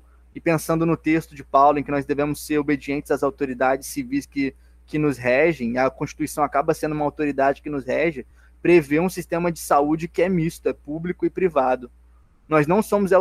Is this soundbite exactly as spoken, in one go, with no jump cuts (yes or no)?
yes